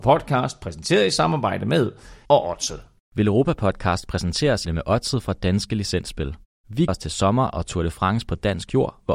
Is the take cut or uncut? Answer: cut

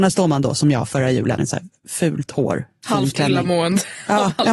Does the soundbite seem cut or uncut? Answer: cut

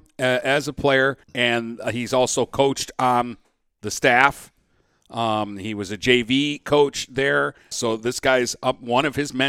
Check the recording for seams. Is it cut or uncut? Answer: cut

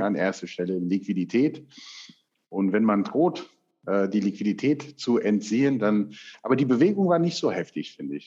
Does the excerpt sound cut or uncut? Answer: uncut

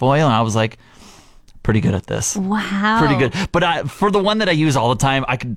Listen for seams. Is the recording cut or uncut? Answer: uncut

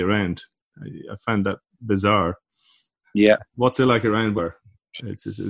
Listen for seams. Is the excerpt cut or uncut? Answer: cut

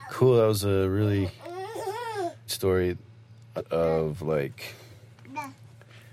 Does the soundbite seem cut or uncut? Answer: cut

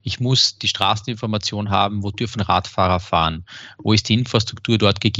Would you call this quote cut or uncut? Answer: uncut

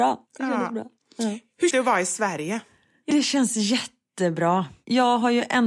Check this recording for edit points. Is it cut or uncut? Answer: cut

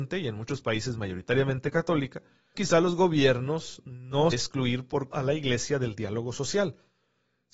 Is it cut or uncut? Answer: cut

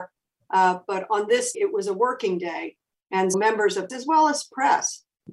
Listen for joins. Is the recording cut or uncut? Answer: cut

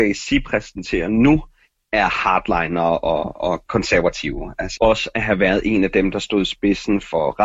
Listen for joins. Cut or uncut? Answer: cut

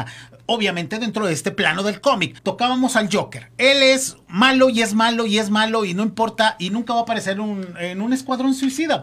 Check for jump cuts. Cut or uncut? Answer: cut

